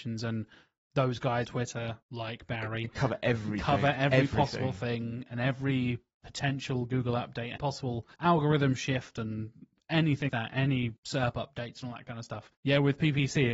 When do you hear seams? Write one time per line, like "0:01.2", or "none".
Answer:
0:01.4
0:02.0
0:07.6
0:08.1
0:10.3
0:11.0
0:12.5